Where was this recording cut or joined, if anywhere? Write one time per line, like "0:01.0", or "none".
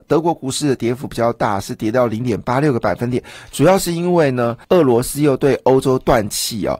0:04.6